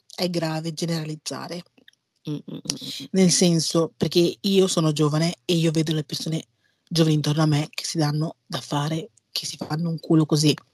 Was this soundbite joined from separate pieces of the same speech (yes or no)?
no